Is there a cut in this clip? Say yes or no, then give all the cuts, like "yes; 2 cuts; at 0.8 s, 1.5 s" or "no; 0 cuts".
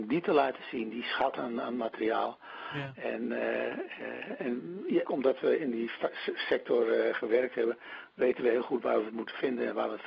yes; 1 cut; at 5.0 s